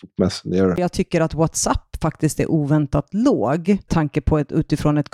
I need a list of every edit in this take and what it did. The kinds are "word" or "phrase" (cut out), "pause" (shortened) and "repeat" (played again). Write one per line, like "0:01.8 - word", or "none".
0:03.9 - word

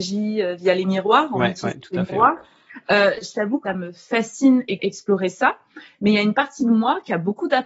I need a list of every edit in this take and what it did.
0:03.7 - word
0:04.8 - phrase

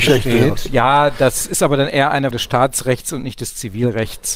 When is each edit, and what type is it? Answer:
0:02.3 - word

